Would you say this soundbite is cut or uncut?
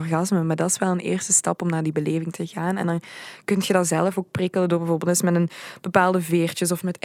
uncut